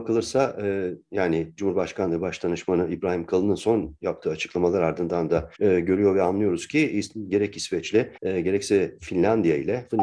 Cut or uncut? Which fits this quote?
cut